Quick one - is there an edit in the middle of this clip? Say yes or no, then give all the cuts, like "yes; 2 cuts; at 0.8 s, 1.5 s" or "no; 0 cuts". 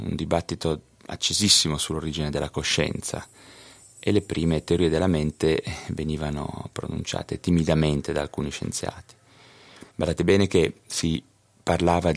yes; 1 cut; at 9.9 s